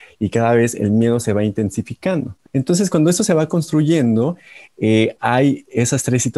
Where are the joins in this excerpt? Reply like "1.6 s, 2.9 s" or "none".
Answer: 2.5 s